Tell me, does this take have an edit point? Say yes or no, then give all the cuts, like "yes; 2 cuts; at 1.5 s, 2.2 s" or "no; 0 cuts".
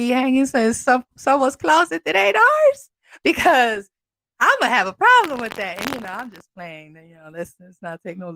no; 0 cuts